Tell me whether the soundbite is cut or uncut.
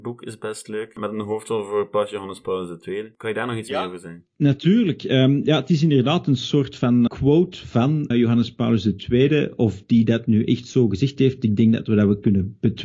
cut